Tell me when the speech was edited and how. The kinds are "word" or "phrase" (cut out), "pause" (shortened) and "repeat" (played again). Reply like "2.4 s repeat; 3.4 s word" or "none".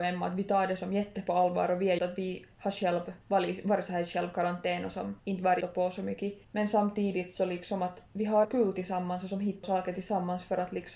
2.0 s word; 3.2 s pause; 5.2 s pause; 5.6 s word; 6.4 s pause; 8.1 s pause; 8.4 s word; 9.6 s word